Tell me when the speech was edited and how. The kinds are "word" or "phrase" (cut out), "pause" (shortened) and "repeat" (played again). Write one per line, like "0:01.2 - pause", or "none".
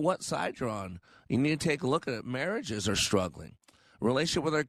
none